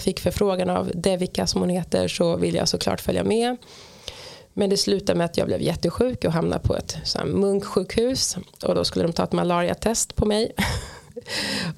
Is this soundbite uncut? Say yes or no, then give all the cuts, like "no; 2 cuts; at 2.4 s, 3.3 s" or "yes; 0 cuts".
yes; 0 cuts